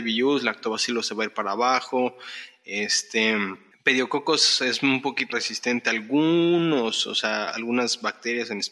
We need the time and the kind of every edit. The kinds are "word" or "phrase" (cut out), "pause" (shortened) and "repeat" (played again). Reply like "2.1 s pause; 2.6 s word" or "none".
3.7 s pause; 5.3 s word; 7.5 s word